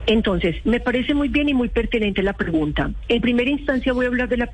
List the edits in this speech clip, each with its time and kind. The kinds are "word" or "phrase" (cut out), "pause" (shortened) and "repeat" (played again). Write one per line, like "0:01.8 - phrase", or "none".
none